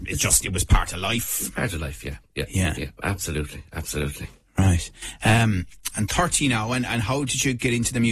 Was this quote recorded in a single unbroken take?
yes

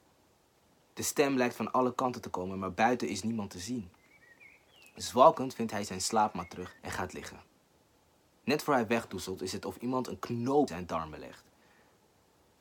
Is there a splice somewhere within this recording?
yes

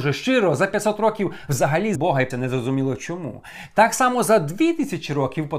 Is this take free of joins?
no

